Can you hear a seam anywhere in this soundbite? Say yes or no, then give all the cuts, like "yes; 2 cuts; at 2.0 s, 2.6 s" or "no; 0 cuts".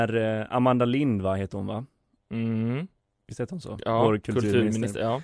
no; 0 cuts